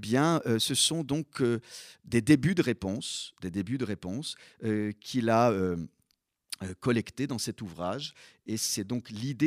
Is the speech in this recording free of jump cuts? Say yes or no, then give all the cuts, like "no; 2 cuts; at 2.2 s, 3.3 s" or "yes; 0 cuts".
yes; 0 cuts